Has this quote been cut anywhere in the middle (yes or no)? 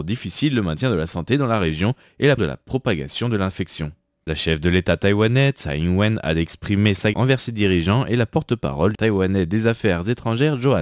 yes